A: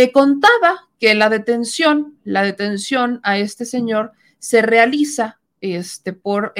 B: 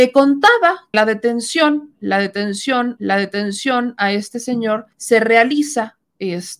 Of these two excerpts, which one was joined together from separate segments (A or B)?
B